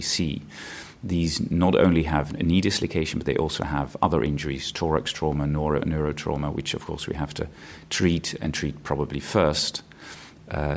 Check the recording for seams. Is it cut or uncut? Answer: uncut